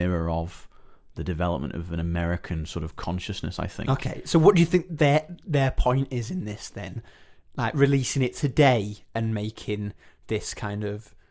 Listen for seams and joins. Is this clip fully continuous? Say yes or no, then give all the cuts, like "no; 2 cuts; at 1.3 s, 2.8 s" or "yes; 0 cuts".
yes; 0 cuts